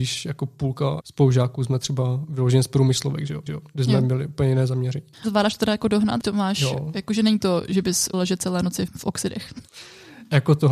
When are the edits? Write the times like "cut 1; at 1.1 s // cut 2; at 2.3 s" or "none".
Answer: cut 1; at 3.5 s // cut 2; at 5.1 s // cut 3; at 6.2 s // cut 4; at 8.1 s // cut 5; at 8.9 s